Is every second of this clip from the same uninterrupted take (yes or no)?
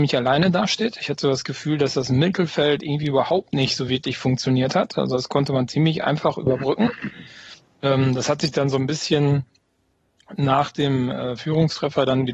yes